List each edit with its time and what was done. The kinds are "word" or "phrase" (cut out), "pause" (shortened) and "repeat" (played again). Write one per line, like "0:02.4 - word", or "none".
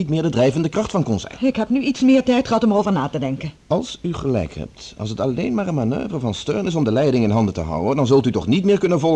0:03.6 - pause